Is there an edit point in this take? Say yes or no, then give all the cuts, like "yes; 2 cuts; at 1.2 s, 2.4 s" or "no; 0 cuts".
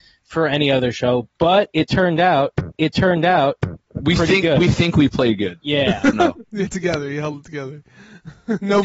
yes; 3 cuts; at 2.8 s, 6.1 s, 6.7 s